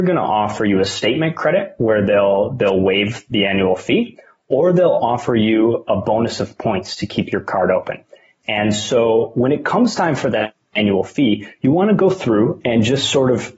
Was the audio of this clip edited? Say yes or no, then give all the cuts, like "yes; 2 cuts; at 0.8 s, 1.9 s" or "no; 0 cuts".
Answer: no; 0 cuts